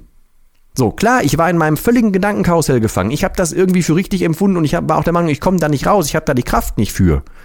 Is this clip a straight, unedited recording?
yes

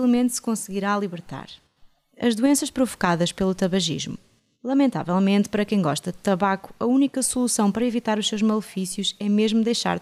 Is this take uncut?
yes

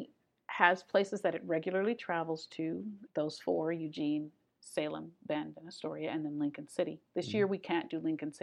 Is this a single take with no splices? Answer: no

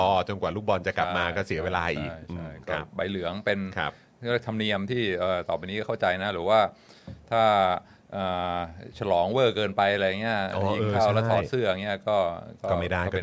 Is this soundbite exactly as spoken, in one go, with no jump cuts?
yes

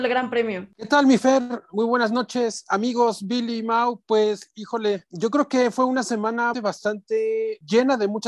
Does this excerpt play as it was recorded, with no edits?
no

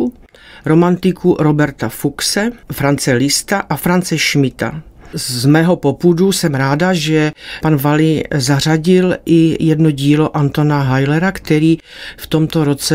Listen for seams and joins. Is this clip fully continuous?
no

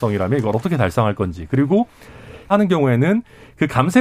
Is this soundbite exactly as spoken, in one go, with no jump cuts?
no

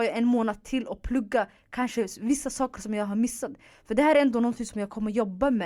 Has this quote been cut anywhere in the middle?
no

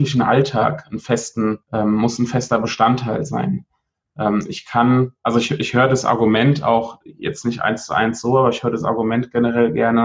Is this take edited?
yes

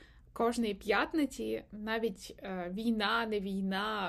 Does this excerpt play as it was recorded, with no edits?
yes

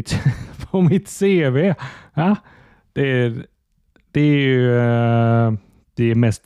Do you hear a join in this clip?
no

